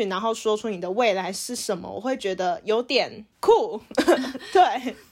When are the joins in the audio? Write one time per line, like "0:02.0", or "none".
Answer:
0:03.3